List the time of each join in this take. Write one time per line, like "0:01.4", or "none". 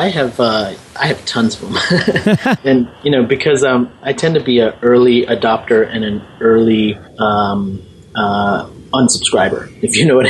0:02.6
0:07.1